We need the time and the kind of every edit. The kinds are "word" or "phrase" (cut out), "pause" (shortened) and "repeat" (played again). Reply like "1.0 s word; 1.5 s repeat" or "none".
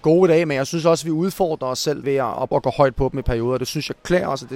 2.0 s word; 2.5 s word